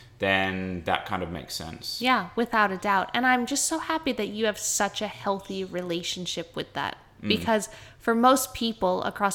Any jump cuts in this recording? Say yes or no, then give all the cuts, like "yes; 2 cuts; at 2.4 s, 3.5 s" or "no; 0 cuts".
no; 0 cuts